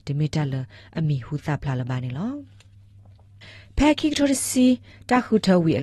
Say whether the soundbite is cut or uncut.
uncut